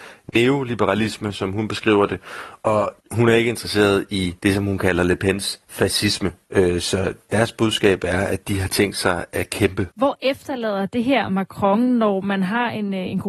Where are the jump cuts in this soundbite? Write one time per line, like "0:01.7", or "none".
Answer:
0:03.0
0:04.4
0:09.9